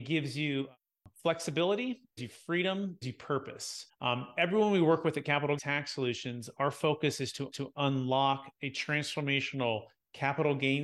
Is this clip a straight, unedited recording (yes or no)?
no